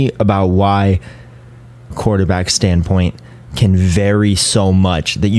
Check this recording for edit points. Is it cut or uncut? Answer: cut